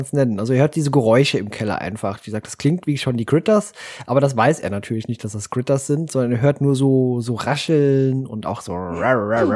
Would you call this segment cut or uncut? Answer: uncut